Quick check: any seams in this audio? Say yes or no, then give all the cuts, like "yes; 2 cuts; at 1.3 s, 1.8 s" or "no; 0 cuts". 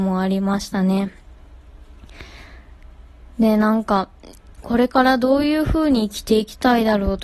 no; 0 cuts